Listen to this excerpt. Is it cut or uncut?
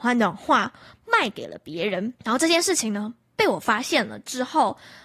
cut